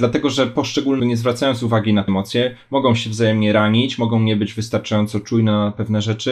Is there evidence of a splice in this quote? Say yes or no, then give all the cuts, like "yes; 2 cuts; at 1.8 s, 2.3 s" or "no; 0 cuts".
yes; 2 cuts; at 1.0 s, 2.1 s